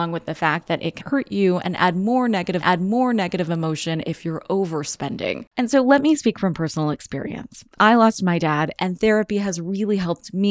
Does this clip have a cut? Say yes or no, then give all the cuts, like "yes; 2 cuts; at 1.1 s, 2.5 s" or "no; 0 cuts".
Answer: yes; 2 cuts; at 1.0 s, 2.6 s